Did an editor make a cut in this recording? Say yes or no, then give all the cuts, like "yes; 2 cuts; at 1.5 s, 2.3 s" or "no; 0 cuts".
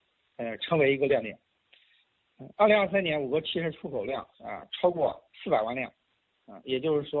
yes; 2 cuts; at 4.3 s, 5.3 s